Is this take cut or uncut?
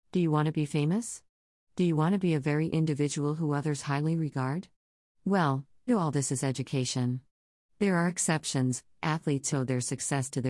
cut